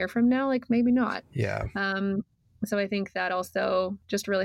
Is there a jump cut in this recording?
no; 0 cuts

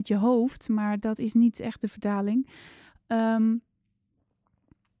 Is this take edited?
no; 0 cuts

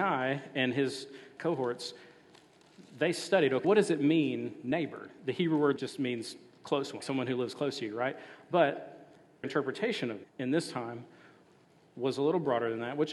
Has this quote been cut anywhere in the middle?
yes; 6 cuts; at 1.4 s, 3.6 s, 5.8 s, 7.0 s, 9.4 s, 10.2 s

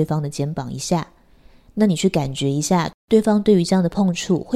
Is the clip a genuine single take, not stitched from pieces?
yes; 0 cuts

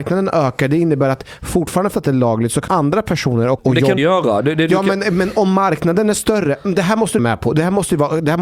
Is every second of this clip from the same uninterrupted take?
no; 5 cuts; at 1.9 s, 2.7 s, 3.6 s, 4.0 s, 7.2 s

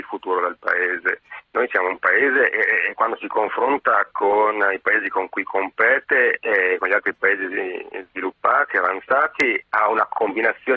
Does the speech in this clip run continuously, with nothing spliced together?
yes; 0 cuts

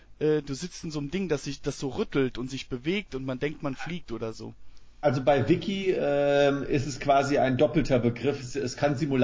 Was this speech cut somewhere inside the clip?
no; 0 cuts

